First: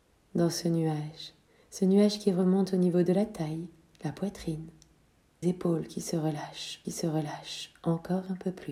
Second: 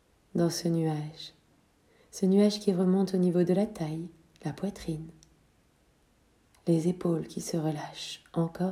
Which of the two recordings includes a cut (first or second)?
first